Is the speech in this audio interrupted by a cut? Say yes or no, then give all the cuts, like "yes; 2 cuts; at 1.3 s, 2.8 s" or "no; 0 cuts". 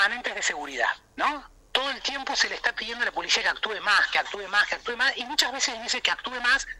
no; 0 cuts